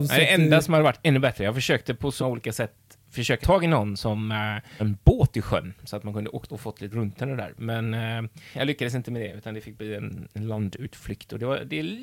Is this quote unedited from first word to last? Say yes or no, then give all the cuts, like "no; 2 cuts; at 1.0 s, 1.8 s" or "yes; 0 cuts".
no; 6 cuts; at 2.2 s, 3.4 s, 4.8 s, 6.5 s, 6.9 s, 8.5 s